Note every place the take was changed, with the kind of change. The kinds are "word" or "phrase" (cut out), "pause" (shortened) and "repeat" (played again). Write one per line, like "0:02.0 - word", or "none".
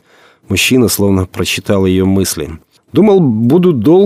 none